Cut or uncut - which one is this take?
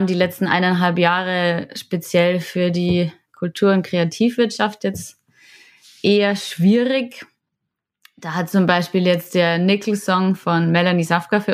uncut